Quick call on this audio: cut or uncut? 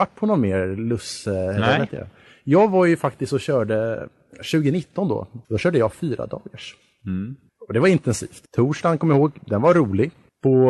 cut